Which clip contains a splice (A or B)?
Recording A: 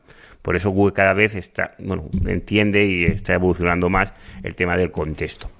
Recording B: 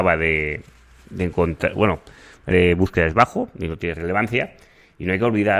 B